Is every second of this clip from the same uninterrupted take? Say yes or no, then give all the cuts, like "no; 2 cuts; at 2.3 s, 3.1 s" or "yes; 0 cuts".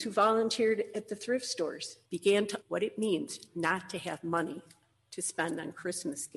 no; 2 cuts; at 2.0 s, 2.6 s